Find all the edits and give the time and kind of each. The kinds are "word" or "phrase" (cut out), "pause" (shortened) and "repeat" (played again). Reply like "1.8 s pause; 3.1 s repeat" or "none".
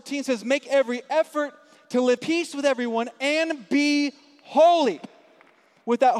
2.2 s word